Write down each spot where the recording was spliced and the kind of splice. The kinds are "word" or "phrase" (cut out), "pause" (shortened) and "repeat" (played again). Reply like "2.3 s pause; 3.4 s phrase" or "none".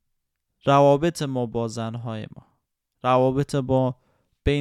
none